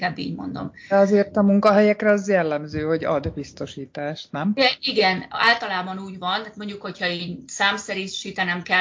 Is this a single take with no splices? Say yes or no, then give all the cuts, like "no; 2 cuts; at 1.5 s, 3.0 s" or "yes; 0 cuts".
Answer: yes; 0 cuts